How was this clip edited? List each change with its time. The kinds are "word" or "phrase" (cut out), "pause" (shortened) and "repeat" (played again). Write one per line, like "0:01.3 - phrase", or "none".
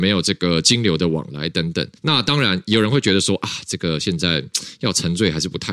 0:02.0 - pause